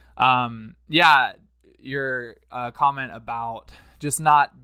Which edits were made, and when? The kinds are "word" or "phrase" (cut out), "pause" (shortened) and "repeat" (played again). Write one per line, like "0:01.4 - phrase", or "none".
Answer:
none